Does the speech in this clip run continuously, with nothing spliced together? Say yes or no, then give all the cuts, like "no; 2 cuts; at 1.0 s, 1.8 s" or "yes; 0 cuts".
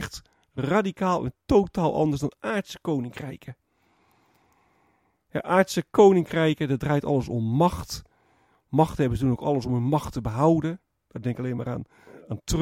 yes; 0 cuts